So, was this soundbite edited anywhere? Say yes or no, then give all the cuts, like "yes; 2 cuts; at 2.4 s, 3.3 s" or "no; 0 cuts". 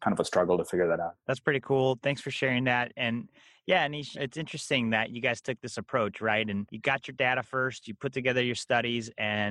no; 0 cuts